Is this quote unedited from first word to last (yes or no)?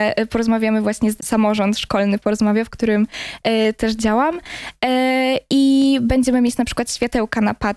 no